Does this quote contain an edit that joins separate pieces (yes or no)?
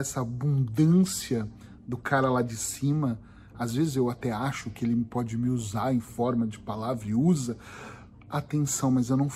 no